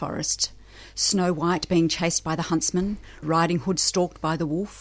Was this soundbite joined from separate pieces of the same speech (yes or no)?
yes